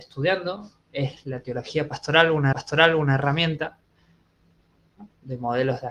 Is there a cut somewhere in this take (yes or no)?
yes